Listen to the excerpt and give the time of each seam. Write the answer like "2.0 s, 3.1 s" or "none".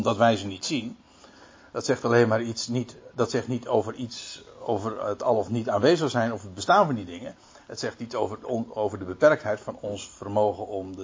none